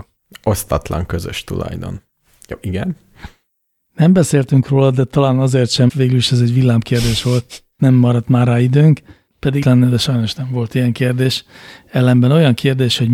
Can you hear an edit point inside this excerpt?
yes; 3 cuts; at 5.9 s, 7.8 s, 9.6 s

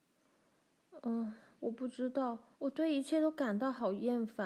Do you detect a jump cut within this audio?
yes; 1 cut; at 2.5 s

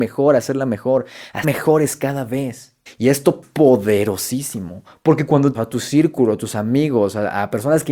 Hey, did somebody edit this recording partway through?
yes; 4 cuts; at 1.4 s, 2.9 s, 3.4 s, 5.5 s

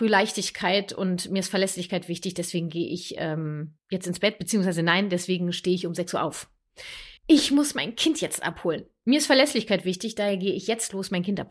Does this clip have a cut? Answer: yes; 2 cuts; at 3.8 s, 7.2 s

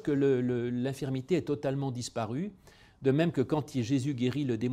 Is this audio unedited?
yes; 0 cuts

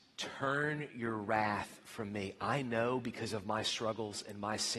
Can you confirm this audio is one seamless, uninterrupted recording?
yes; 0 cuts

